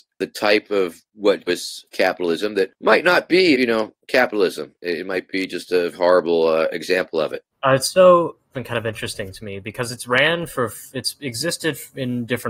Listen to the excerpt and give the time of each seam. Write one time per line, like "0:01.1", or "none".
0:01.5
0:03.5
0:05.9
0:07.5
0:08.5